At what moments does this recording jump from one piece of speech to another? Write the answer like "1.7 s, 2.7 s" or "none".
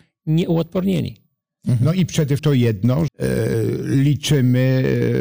2.4 s, 3.1 s